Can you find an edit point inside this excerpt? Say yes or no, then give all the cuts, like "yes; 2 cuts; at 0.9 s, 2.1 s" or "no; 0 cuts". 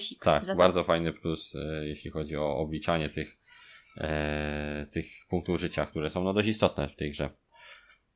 no; 0 cuts